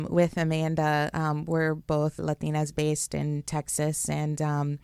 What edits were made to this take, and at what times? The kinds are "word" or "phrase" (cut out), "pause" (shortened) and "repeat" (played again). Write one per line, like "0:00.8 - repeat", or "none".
0:02.2 - word